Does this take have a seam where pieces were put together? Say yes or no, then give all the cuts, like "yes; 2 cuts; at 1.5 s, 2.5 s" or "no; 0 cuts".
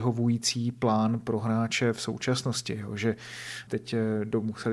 no; 0 cuts